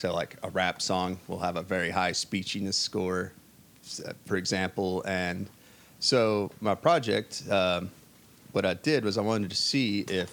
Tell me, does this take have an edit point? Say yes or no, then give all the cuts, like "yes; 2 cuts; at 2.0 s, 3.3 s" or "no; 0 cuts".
no; 0 cuts